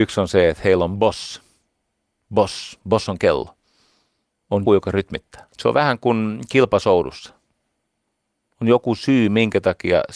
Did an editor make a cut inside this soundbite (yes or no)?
yes